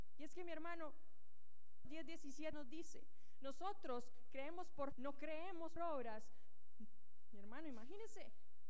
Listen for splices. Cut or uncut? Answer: cut